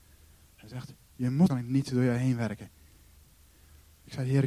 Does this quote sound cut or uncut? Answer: cut